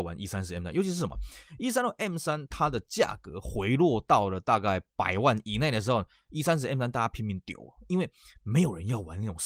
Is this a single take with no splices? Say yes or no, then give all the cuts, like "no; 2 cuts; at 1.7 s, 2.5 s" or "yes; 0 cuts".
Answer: yes; 0 cuts